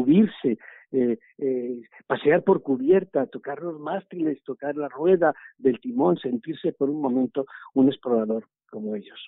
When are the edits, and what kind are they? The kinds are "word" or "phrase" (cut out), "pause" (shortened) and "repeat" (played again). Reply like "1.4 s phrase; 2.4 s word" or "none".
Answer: none